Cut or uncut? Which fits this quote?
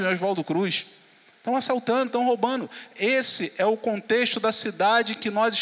uncut